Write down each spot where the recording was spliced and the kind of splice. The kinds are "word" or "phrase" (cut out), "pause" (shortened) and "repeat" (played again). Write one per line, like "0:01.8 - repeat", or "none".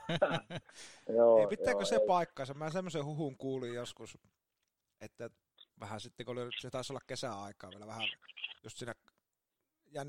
0:05.7 - pause
0:08.6 - pause